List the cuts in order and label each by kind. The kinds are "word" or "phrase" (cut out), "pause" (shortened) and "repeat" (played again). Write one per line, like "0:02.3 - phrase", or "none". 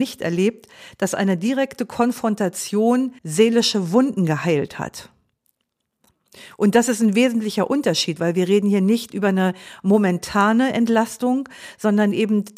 0:03.2 - pause